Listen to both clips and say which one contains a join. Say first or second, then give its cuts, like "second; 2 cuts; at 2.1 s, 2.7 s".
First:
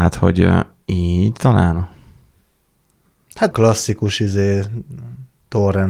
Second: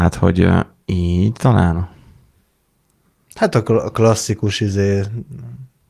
first; 1 cut; at 3.5 s